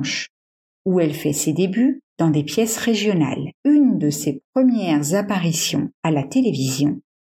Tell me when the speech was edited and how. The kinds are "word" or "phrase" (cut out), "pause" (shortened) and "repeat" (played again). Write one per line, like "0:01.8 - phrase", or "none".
0:03.5 - pause